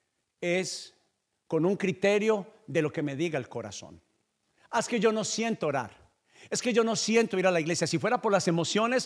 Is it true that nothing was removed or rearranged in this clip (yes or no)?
yes